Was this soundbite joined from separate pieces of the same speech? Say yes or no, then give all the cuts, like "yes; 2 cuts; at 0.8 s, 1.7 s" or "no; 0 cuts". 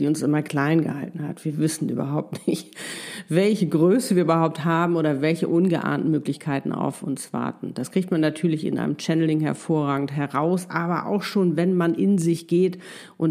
no; 0 cuts